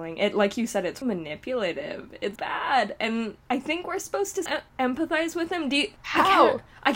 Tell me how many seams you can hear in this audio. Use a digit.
3